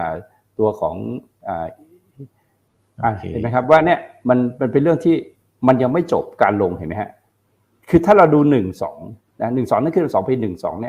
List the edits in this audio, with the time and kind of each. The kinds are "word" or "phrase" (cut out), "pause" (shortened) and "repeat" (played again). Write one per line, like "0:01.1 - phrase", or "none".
none